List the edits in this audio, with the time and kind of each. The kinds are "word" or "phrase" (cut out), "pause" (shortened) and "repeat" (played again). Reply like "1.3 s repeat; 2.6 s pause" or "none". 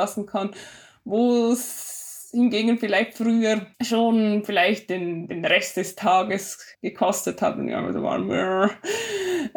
3.7 s pause; 6.7 s pause